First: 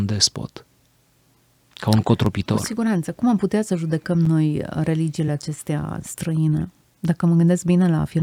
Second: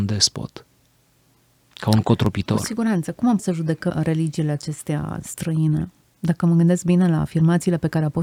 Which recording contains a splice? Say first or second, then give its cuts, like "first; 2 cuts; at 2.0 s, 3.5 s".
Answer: second; 2 cuts; at 3.4 s, 3.9 s